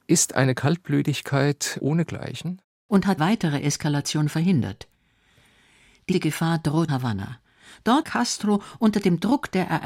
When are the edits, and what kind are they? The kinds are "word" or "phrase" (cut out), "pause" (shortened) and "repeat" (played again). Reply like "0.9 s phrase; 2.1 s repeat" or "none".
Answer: 3.2 s phrase; 6.1 s word; 6.9 s word; 8.0 s phrase